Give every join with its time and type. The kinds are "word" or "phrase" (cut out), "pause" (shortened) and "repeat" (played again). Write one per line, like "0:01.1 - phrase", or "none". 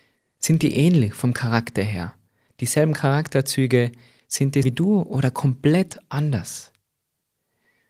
0:04.6 - word